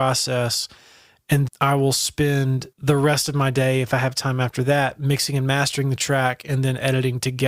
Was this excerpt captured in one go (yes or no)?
no